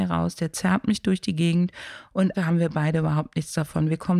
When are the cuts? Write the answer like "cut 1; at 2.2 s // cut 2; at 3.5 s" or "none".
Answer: cut 1; at 2.3 s